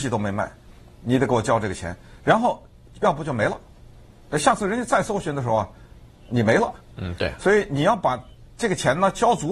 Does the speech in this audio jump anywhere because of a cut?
no; 0 cuts

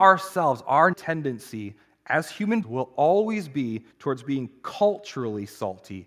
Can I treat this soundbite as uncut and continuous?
no; 3 cuts; at 0.9 s, 2.6 s, 3.9 s

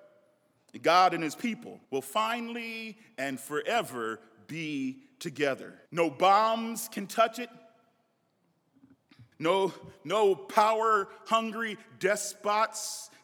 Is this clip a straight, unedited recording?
no; 3 cuts; at 1.8 s, 5.9 s, 9.3 s

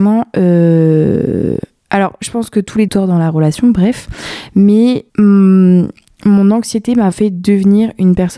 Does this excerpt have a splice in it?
yes; 4 cuts; at 1.8 s, 2.9 s, 5.1 s, 7.1 s

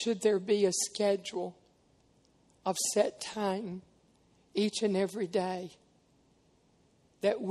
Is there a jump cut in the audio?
no; 0 cuts

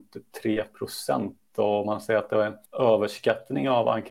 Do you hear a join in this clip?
yes; 1 cut; at 2.7 s

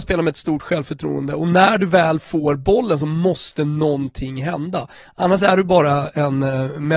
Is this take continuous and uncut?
yes; 0 cuts

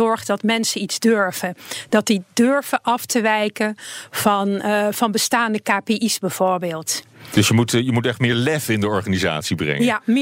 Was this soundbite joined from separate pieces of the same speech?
no; 0 cuts

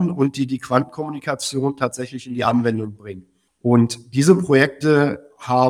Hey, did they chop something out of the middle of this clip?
no; 0 cuts

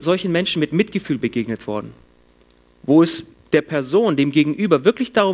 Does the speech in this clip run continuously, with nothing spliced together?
no; 1 cut; at 3.3 s

